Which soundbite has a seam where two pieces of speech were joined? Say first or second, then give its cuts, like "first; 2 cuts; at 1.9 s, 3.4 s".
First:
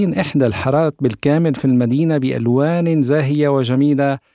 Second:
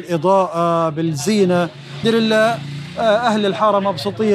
second; 1 cut; at 2.0 s